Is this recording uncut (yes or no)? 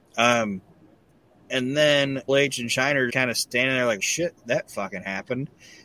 no